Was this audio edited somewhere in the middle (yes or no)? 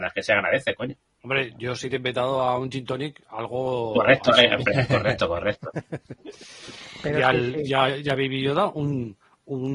no